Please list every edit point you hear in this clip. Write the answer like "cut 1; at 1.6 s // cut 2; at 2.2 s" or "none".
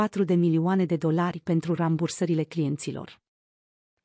none